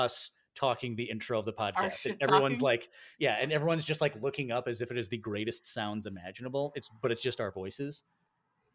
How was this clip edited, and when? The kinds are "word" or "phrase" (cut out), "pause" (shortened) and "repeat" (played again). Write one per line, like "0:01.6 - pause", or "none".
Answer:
none